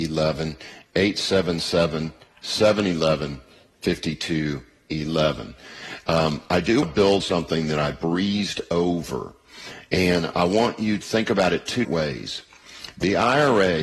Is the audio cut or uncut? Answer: cut